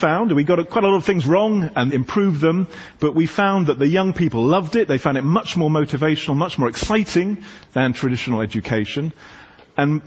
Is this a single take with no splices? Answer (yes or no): no